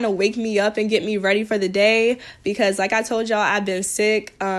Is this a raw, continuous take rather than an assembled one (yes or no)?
yes